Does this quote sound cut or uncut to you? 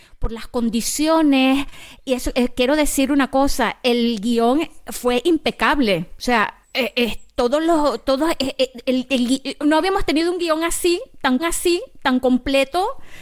cut